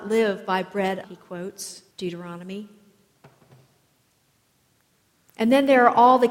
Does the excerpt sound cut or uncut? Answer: cut